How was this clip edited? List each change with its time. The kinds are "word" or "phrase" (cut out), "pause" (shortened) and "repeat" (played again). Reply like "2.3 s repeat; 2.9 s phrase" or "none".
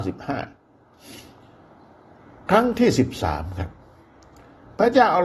none